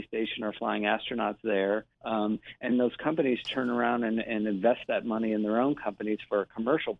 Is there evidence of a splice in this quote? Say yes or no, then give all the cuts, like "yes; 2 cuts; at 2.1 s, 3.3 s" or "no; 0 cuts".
yes; 2 cuts; at 1.9 s, 2.7 s